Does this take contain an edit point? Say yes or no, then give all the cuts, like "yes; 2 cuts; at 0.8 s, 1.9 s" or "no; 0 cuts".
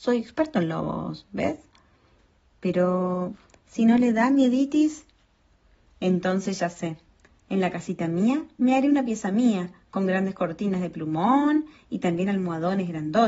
no; 0 cuts